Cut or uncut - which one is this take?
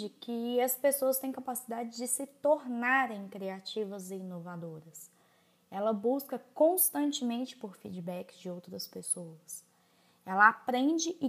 uncut